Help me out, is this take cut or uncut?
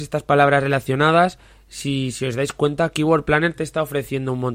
uncut